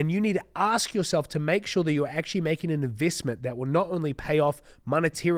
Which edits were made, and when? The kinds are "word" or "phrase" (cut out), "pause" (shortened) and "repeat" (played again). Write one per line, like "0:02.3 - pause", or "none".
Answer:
none